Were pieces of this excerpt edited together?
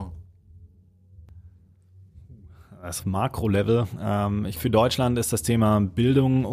yes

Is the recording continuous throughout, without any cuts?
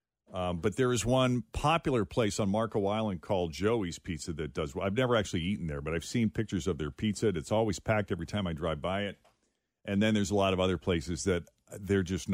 yes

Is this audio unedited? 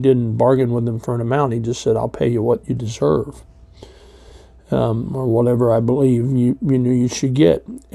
yes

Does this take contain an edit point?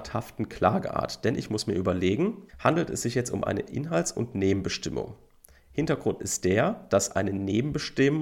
yes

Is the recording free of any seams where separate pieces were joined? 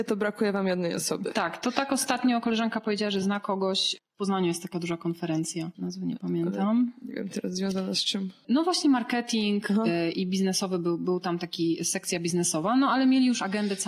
yes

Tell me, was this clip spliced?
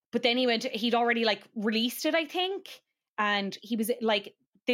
no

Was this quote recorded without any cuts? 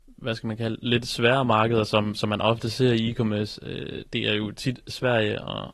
yes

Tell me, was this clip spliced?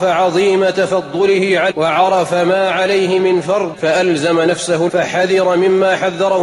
yes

